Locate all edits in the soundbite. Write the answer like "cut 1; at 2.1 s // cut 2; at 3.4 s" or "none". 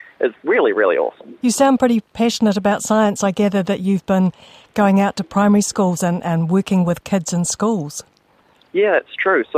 none

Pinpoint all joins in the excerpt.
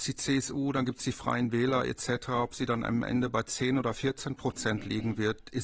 none

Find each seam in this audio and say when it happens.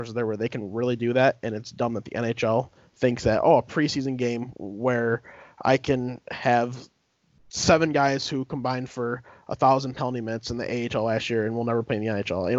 none

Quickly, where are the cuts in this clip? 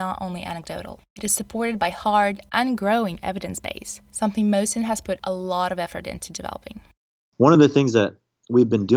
none

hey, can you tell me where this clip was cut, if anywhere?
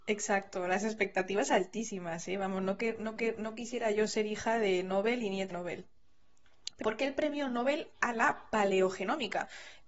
cut 1; at 3.2 s // cut 2; at 5.5 s // cut 3; at 6.8 s

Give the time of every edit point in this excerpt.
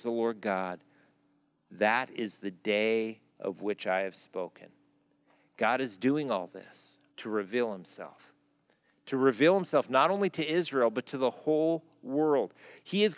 cut 1; at 3.3 s // cut 2; at 7.1 s

